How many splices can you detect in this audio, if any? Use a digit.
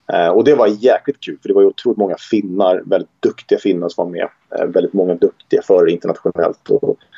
0